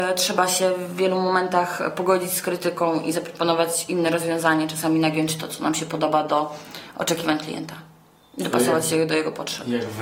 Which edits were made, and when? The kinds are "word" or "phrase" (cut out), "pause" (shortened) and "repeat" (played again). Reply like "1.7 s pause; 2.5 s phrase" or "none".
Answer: none